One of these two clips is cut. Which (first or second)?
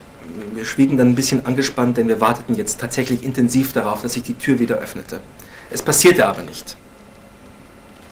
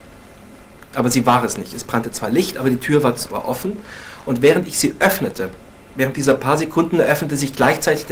second